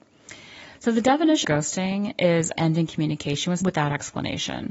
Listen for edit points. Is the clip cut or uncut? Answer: cut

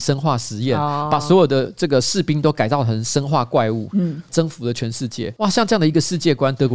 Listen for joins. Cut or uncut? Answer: uncut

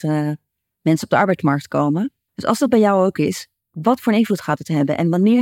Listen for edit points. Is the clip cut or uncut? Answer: cut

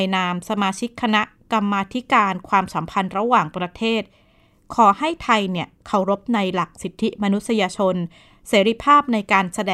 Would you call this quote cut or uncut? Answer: uncut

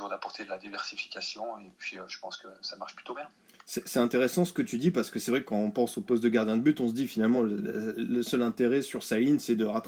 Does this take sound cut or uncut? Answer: uncut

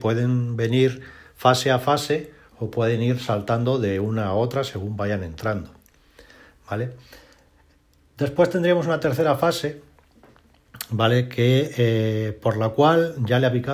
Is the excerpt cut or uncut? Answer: uncut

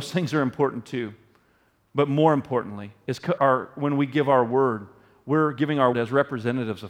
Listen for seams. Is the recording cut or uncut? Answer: cut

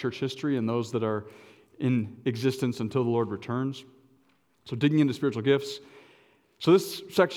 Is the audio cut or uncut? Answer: uncut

